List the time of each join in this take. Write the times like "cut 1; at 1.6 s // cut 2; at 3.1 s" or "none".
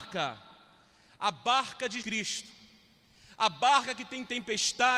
cut 1; at 2.0 s